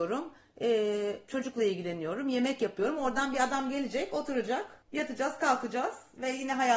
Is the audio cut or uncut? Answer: cut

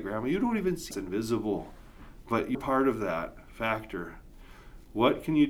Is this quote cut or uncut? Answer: cut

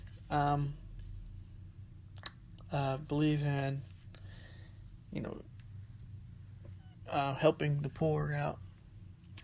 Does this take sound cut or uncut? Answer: uncut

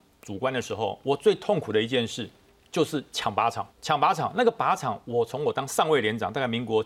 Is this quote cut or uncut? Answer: cut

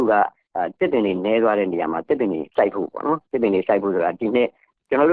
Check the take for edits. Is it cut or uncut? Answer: cut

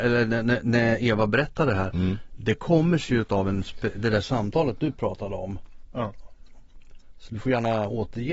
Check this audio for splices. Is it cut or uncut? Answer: uncut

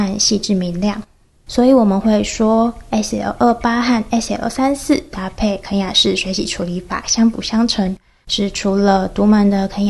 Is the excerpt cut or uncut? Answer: uncut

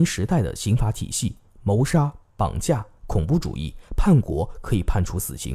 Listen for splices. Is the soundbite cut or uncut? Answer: uncut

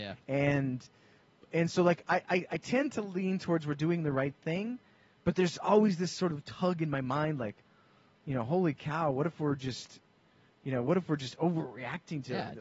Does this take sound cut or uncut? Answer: uncut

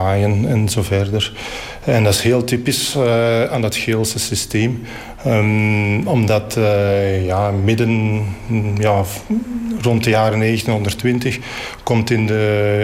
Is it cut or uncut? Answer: uncut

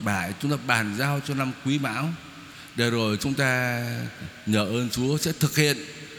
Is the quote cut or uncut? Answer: uncut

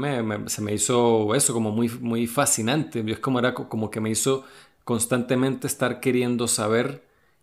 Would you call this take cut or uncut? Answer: uncut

